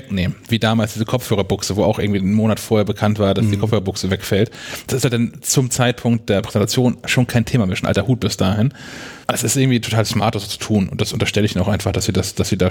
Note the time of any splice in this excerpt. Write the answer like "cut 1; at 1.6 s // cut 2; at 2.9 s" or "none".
cut 1; at 9.2 s